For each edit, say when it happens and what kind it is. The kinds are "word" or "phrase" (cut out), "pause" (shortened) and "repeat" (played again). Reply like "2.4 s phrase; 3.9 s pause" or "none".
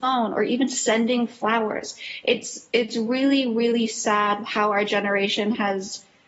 none